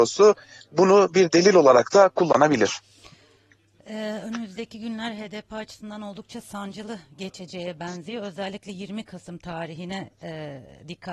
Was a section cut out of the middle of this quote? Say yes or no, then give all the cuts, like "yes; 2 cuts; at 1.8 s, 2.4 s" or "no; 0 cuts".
no; 0 cuts